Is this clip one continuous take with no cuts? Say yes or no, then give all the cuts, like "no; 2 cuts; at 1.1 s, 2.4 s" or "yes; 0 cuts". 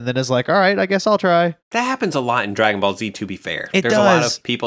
no; 1 cut; at 1.6 s